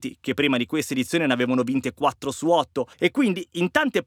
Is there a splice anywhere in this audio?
yes; 1 cut; at 2.9 s

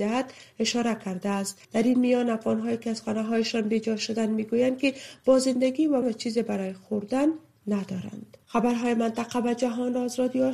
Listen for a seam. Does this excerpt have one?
yes; 3 cuts; at 1.6 s, 6.0 s, 8.4 s

